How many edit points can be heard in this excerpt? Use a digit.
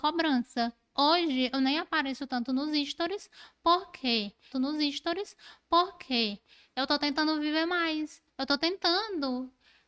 2